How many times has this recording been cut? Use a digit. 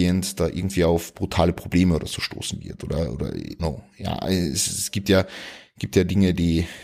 1